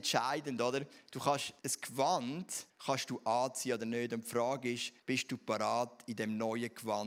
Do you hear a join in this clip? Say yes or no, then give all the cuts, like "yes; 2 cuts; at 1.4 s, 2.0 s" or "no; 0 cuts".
yes; 3 cuts; at 1.6 s, 2.7 s, 5.0 s